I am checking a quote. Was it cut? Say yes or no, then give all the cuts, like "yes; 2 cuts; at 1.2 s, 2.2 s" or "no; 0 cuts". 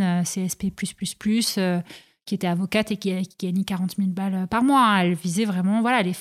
no; 0 cuts